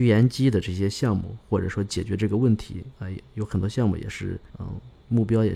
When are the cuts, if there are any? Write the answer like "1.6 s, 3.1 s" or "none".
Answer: 2.9 s, 4.5 s

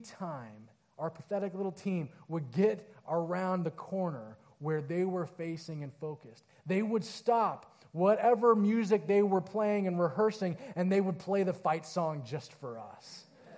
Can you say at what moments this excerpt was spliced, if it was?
none

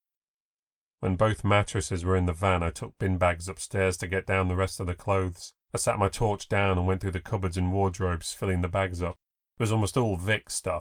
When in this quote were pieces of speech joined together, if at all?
5.6 s

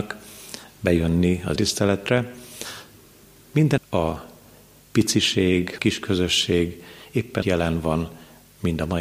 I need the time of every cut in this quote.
1.6 s, 3.8 s, 5.8 s, 7.4 s

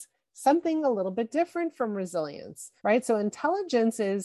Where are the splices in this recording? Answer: 2.8 s

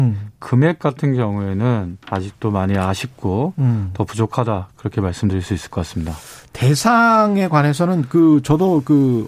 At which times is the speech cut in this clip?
2.0 s

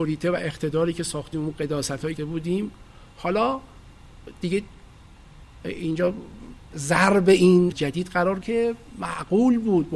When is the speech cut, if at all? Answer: 1.3 s, 2.2 s, 6.7 s, 7.7 s, 8.4 s

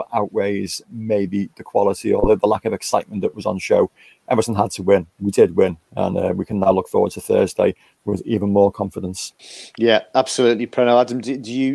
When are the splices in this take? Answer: none

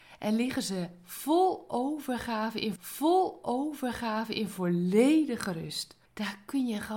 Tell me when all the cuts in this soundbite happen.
2.8 s, 6.0 s

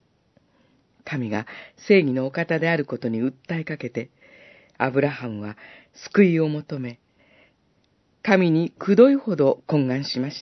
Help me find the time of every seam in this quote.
none

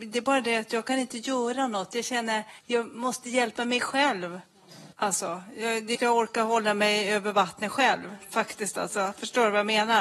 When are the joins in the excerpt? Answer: 2.6 s, 4.9 s, 5.9 s

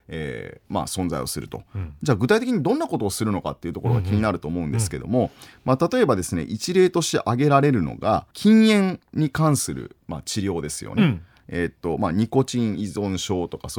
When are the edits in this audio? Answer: 8.3 s

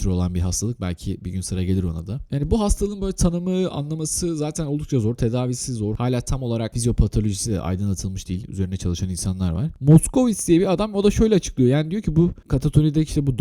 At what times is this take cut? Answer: none

